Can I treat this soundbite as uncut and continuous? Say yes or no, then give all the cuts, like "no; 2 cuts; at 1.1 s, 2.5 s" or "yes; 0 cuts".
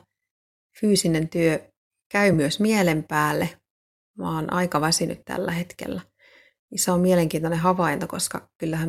yes; 0 cuts